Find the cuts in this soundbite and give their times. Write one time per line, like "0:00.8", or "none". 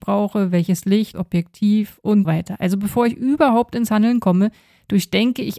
0:01.1
0:02.2